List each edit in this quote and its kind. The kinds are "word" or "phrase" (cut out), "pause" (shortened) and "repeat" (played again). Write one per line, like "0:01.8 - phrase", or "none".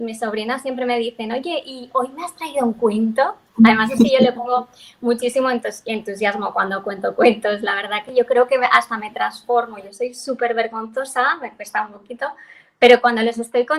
none